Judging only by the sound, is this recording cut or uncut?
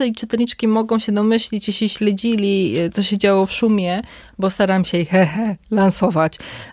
uncut